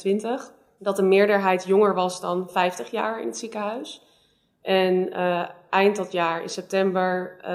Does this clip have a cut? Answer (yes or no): no